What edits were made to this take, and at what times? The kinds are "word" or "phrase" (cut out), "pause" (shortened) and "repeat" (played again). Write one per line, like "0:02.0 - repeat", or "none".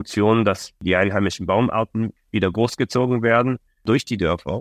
none